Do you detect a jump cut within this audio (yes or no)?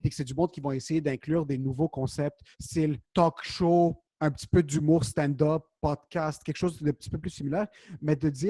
yes